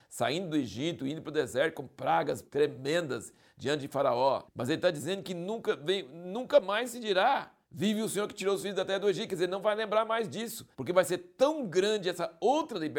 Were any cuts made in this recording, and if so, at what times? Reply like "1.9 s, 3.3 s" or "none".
4.5 s, 7.6 s, 10.7 s